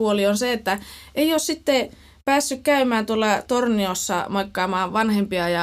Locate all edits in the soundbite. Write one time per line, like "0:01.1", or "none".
none